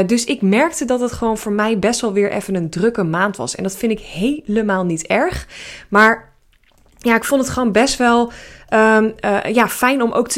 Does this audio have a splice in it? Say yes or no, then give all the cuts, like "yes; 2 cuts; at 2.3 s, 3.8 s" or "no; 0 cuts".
no; 0 cuts